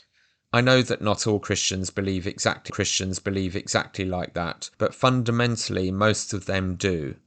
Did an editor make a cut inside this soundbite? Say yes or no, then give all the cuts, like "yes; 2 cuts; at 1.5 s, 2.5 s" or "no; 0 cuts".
yes; 2 cuts; at 2.7 s, 4.7 s